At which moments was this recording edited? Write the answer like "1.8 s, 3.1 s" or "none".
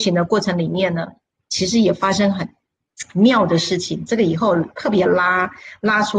none